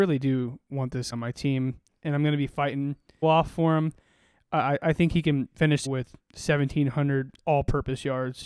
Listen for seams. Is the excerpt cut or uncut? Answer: cut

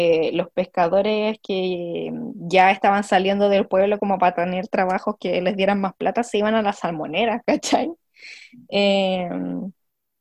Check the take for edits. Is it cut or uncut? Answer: uncut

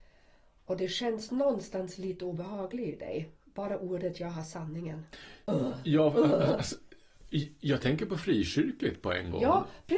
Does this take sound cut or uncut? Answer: cut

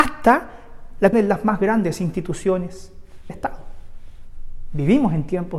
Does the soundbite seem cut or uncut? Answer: cut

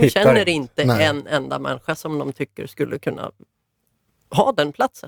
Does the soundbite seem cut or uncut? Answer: uncut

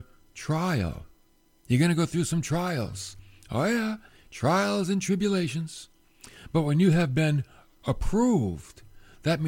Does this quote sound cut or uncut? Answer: uncut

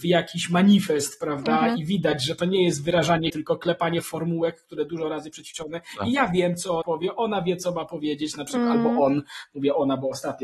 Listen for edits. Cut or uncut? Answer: cut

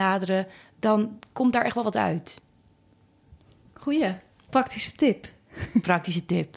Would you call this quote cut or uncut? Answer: uncut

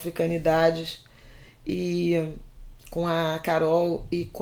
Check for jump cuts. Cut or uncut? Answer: cut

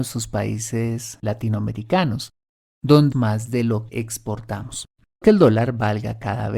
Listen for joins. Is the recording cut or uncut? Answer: cut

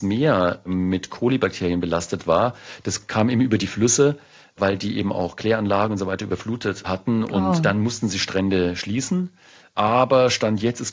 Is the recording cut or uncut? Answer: uncut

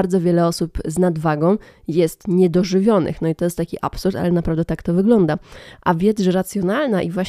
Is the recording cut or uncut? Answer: uncut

